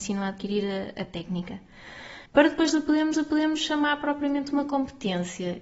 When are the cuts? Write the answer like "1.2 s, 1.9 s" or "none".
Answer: 2.3 s, 3.1 s